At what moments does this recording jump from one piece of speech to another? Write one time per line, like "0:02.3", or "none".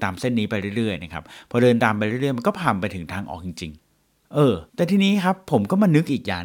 0:03.8
0:04.7